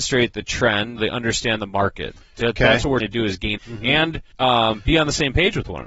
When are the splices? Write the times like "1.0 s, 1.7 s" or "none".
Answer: 1.0 s, 3.0 s, 3.6 s, 4.3 s